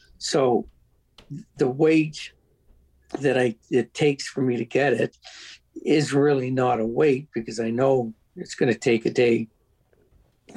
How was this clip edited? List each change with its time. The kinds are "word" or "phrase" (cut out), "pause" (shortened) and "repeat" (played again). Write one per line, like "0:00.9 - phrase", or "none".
0:01.5 - pause